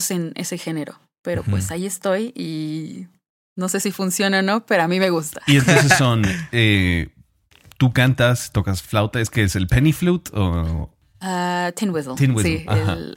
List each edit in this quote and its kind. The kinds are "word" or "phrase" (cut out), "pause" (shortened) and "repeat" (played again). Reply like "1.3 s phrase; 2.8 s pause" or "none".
none